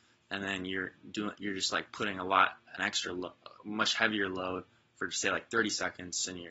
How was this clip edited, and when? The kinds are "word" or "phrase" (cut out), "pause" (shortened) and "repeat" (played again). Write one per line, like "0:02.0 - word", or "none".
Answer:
none